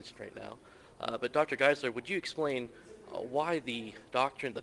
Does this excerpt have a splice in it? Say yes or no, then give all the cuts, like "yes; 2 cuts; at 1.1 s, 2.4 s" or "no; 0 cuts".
no; 0 cuts